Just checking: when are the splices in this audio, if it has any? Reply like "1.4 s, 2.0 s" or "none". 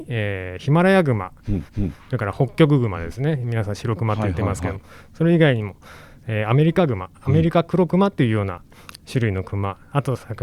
1.7 s